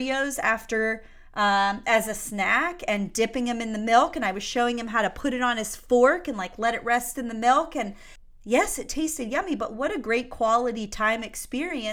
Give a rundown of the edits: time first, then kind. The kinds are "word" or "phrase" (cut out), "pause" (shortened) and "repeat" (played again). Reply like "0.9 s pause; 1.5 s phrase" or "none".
none